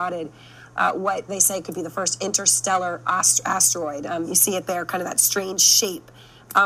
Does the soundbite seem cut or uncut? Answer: cut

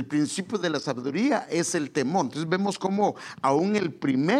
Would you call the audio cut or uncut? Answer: uncut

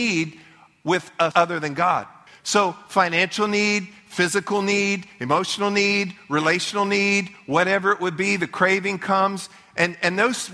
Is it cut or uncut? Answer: cut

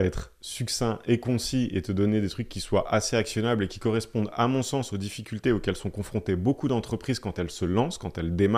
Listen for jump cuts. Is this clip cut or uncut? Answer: uncut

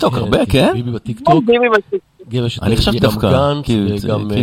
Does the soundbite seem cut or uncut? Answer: cut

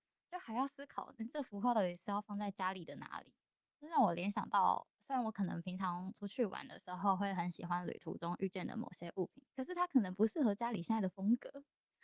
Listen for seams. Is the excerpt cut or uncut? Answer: cut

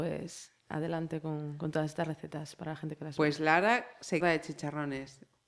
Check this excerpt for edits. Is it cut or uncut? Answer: cut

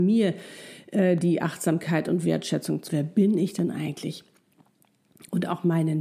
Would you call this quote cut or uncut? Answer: cut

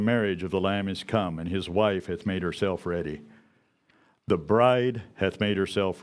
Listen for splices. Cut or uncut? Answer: uncut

